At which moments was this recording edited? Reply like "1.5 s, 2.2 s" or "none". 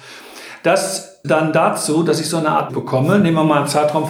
1.2 s, 2.7 s